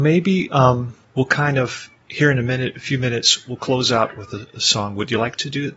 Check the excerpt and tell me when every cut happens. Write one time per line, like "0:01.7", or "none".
0:01.0